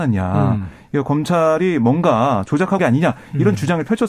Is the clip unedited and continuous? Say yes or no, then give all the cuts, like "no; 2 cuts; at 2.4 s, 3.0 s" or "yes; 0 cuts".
no; 1 cut; at 2.8 s